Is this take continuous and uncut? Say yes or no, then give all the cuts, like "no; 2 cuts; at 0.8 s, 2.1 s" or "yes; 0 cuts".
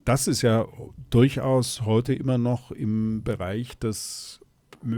yes; 0 cuts